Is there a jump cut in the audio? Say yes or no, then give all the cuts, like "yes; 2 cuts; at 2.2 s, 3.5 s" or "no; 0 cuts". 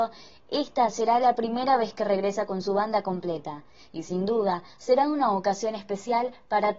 no; 0 cuts